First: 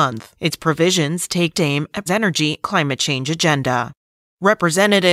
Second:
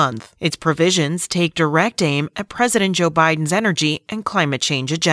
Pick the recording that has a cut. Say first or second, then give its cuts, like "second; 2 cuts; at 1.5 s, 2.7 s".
first; 3 cuts; at 1.5 s, 2.1 s, 2.6 s